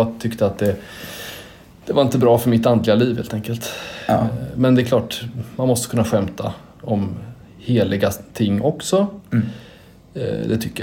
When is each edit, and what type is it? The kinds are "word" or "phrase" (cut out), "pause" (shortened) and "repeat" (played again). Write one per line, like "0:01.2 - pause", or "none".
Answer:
none